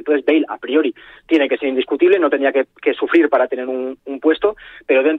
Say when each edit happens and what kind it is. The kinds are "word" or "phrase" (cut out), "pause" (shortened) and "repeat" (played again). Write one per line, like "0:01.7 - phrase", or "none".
none